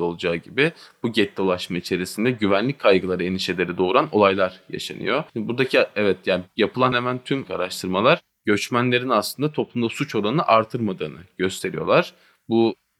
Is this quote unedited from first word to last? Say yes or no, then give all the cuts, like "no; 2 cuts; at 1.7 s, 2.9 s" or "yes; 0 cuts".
no; 3 cuts; at 5.3 s, 6.9 s, 7.4 s